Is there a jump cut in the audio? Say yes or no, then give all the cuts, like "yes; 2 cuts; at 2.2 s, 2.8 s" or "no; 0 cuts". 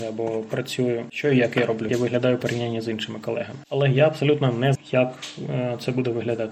yes; 2 cuts; at 1.9 s, 4.7 s